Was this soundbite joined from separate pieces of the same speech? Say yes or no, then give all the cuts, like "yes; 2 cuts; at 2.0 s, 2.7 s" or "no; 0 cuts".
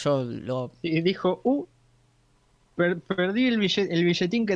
no; 0 cuts